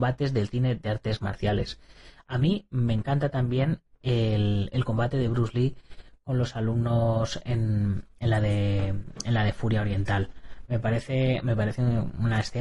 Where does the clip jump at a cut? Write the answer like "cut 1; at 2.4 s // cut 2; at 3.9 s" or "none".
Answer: none